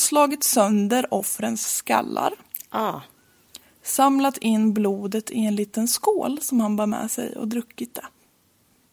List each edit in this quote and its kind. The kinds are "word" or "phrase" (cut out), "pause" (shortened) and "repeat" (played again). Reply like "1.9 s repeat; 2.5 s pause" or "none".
none